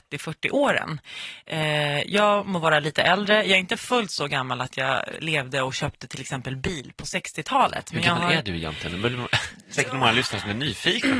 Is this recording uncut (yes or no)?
yes